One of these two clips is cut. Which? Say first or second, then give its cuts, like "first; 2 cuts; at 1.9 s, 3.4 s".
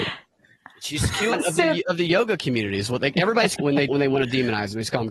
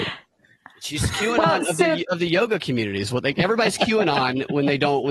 first; 3 cuts; at 1.3 s, 3.6 s, 3.9 s